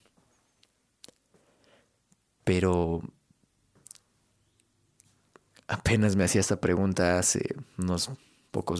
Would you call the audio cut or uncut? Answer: uncut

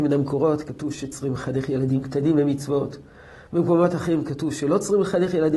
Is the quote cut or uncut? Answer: uncut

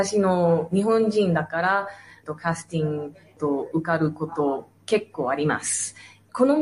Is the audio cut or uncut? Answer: uncut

